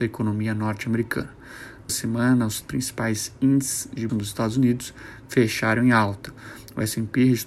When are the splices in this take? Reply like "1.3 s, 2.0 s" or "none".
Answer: 1.9 s, 2.6 s, 4.1 s